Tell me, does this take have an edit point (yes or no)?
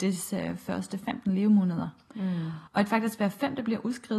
yes